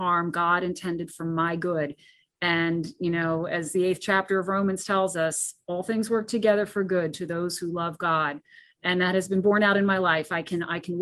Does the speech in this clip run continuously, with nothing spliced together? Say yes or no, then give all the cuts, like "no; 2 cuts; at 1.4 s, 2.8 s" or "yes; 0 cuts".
yes; 0 cuts